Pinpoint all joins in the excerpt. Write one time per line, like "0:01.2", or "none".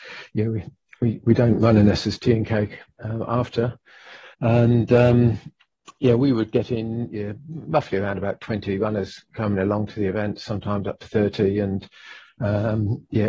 0:04.3